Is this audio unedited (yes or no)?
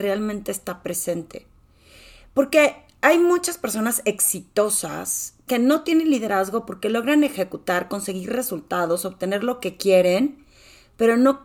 yes